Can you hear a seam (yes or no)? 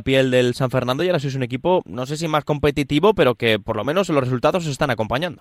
no